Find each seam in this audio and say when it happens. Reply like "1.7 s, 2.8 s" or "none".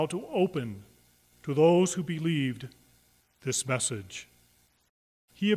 none